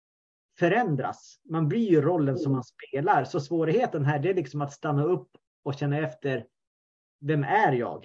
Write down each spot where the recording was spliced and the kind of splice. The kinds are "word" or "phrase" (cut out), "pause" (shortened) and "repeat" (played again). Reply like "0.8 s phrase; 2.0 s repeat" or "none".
none